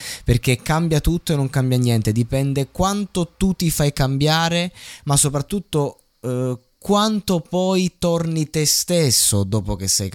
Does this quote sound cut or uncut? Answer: uncut